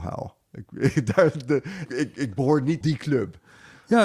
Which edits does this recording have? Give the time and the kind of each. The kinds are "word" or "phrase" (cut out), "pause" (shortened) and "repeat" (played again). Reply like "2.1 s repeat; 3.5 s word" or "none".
1.9 s word; 2.8 s phrase